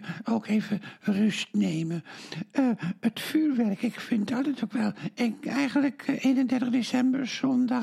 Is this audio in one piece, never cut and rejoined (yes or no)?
yes